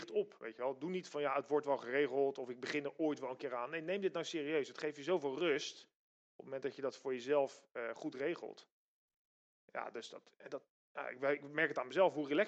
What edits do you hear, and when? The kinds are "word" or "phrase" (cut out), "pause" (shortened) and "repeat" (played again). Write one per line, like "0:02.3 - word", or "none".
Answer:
none